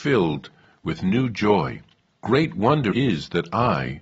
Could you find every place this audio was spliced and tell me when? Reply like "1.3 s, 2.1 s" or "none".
2.1 s, 2.9 s